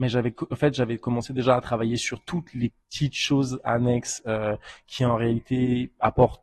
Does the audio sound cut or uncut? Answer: cut